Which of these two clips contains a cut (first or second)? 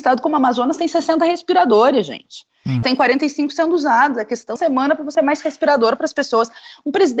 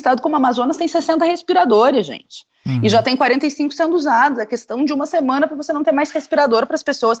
first